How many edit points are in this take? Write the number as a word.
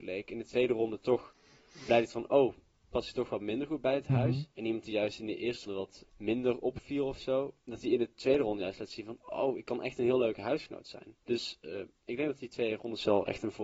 five